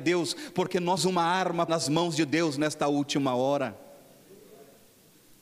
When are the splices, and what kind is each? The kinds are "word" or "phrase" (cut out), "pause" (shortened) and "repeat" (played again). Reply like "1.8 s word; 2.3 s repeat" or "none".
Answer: 1.0 s word; 1.7 s word